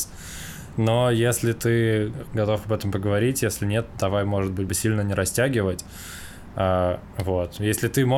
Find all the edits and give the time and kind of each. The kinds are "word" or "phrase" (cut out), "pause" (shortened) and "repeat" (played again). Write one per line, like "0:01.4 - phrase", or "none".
0:04.7 - phrase